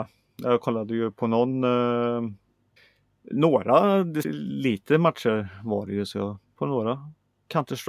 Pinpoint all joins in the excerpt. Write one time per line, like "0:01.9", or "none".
0:02.8
0:04.2
0:06.6